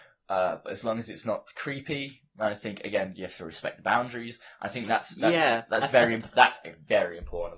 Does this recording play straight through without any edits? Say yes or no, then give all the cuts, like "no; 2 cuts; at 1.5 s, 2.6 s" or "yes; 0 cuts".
yes; 0 cuts